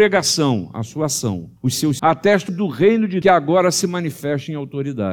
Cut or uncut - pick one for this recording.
cut